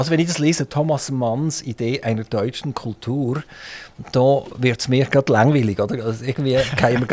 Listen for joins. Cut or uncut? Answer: uncut